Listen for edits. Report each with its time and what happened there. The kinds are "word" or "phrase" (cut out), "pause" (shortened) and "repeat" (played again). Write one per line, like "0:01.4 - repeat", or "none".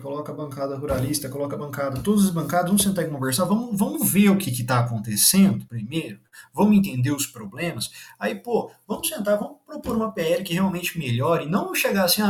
none